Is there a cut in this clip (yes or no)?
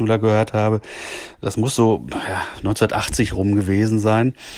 no